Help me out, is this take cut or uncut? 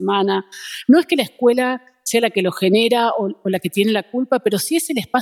uncut